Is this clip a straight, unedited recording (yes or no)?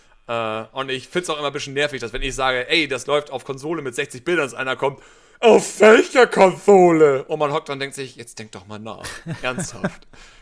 yes